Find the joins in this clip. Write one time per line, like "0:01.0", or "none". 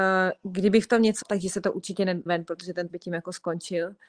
0:01.2
0:02.3
0:02.9